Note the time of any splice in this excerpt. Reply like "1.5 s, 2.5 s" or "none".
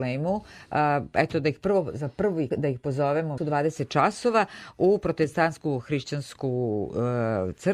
2.5 s, 3.4 s